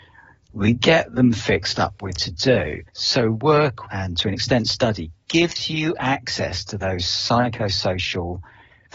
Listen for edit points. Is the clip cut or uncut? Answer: cut